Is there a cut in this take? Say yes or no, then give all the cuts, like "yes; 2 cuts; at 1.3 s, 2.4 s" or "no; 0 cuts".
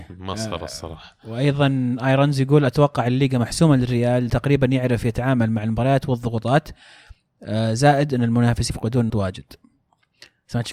yes; 3 cuts; at 4.3 s, 8.7 s, 9.1 s